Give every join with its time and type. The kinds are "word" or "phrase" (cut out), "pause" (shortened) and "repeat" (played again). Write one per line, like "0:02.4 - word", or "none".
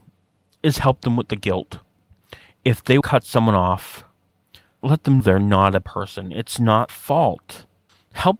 0:03.0 - word
0:04.8 - word
0:05.2 - word
0:05.8 - word
0:06.9 - word